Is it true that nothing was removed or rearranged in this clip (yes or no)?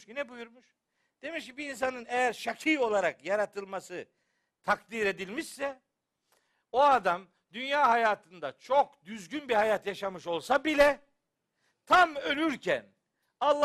yes